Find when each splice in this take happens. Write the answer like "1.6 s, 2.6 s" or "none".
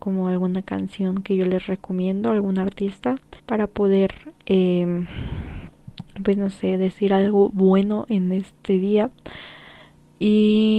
3.4 s

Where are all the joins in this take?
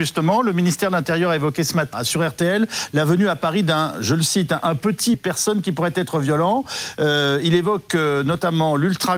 1.9 s, 5.1 s

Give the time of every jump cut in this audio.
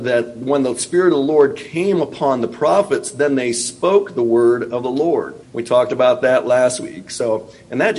5.4 s

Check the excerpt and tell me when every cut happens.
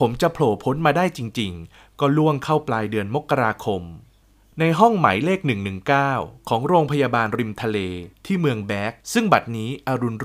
9.0 s

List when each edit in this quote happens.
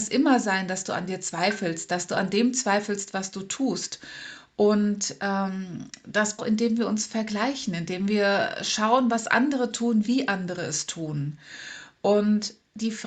6.4 s

